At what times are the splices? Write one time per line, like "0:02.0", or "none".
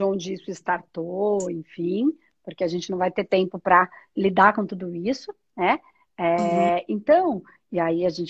none